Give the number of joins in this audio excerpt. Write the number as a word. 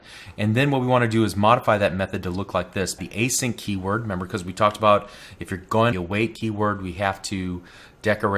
two